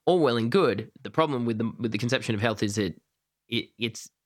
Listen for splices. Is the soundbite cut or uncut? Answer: uncut